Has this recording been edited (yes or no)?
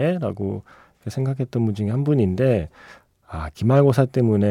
no